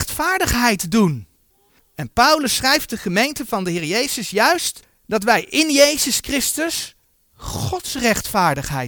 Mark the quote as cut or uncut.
uncut